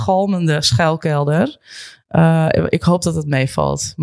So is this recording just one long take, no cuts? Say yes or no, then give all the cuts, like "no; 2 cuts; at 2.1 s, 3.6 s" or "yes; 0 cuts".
yes; 0 cuts